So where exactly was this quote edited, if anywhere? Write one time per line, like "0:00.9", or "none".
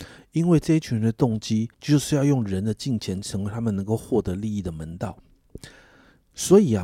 0:01.7

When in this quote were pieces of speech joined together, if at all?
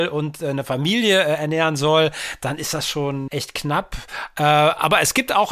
0:03.3

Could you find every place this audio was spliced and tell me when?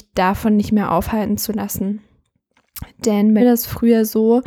0:03.4

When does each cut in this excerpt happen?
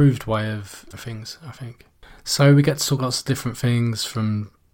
0:00.9
0:03.0

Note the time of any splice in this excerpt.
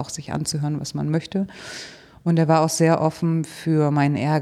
none

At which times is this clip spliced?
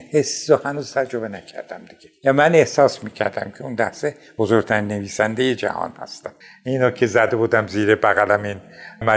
0:06.4

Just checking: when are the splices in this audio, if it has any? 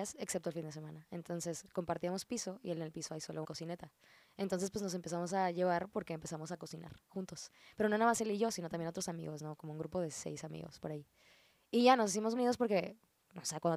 0:03.4
0:12.4

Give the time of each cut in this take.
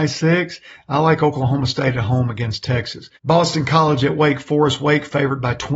0:03.2

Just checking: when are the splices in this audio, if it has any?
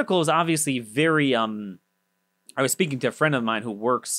none

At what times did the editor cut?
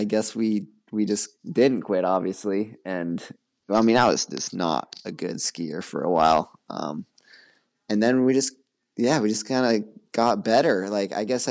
0:01.3

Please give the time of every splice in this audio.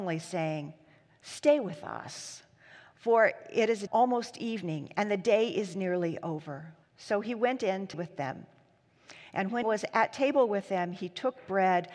0:03.9
0:06.8
0:07.9
0:09.6

